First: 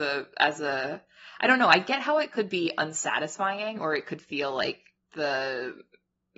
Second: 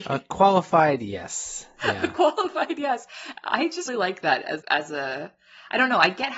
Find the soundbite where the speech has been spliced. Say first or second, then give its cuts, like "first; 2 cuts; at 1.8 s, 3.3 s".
second; 2 cuts; at 3.9 s, 4.6 s